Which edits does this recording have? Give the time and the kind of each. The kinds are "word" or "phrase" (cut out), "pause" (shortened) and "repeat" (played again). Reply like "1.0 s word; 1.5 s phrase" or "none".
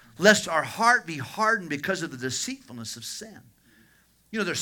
none